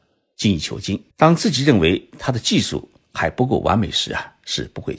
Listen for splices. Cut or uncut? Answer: cut